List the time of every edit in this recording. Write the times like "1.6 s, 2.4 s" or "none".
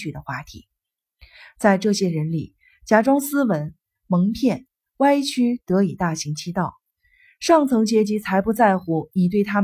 none